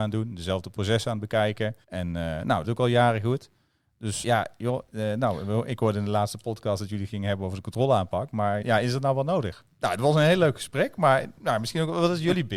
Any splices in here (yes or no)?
yes